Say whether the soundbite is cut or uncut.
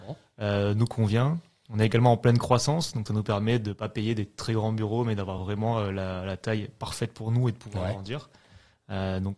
uncut